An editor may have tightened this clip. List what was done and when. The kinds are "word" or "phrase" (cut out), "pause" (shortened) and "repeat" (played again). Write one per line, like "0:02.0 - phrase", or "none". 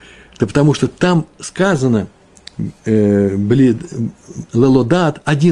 none